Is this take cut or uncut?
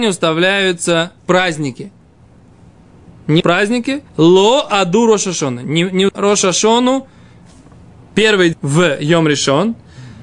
cut